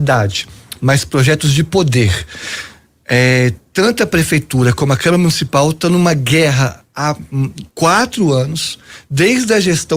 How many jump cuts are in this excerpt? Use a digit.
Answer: 1